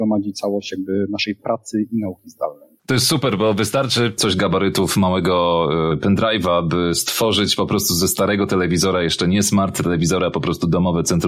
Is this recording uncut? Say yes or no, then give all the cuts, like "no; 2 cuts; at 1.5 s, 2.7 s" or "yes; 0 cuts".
yes; 0 cuts